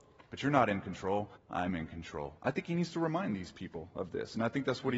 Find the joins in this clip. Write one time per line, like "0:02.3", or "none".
0:01.4
0:02.4